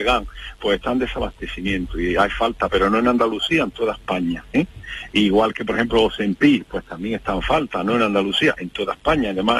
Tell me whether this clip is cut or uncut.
uncut